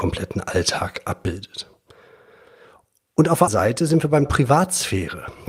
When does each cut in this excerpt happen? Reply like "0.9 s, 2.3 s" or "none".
3.5 s, 4.3 s